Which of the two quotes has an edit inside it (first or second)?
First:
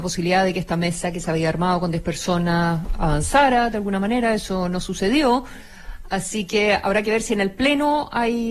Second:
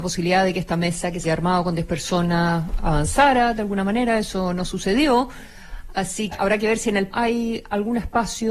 second